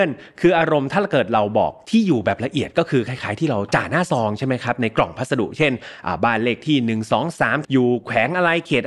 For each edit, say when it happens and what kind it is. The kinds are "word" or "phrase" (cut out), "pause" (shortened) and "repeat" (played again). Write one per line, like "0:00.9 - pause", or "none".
0:07.6 - phrase